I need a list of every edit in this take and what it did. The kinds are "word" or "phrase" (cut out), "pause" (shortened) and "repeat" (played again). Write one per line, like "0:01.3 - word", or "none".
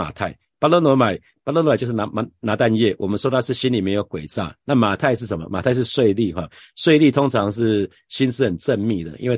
none